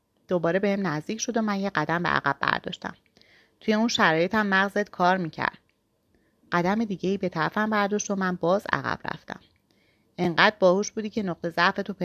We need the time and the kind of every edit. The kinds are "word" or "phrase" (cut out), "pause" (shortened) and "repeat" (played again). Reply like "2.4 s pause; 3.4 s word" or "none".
none